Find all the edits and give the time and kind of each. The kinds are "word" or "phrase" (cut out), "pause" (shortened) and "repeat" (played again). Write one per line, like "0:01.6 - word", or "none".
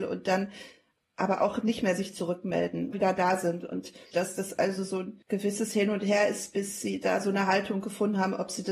0:02.9 - phrase
0:04.1 - phrase
0:05.2 - pause